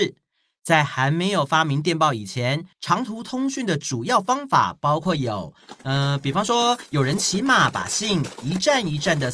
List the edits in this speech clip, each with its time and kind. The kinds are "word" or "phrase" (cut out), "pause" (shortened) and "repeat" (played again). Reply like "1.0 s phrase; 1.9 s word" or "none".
2.7 s pause; 5.8 s pause

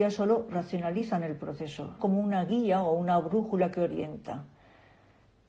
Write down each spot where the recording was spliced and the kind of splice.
2.0 s word

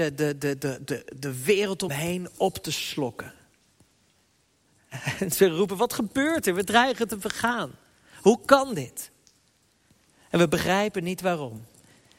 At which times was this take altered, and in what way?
1.9 s word

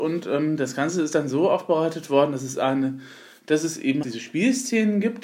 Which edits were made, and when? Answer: 4.0 s word

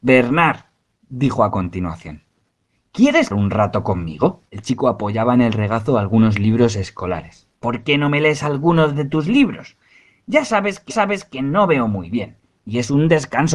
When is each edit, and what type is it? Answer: 3.3 s phrase; 4.5 s pause; 7.5 s pause; 10.9 s repeat

